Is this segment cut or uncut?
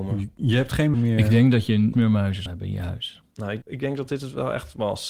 cut